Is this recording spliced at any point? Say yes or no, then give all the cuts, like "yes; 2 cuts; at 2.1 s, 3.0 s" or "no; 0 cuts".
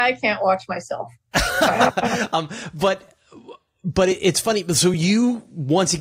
no; 0 cuts